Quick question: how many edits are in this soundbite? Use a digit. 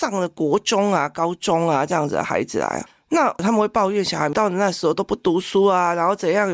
0